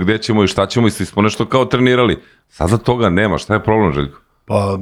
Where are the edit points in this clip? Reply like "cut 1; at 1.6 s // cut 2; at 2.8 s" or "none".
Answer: none